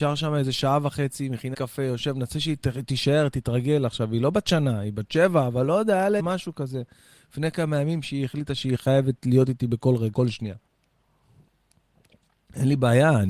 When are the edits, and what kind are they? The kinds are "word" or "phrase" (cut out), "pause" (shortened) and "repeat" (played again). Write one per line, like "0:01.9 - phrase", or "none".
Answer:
0:01.5 - word
0:06.2 - word
0:10.1 - word